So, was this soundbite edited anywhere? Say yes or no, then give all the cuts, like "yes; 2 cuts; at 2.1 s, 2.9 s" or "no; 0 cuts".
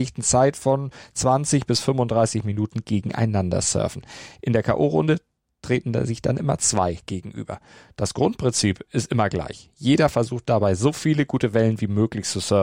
no; 0 cuts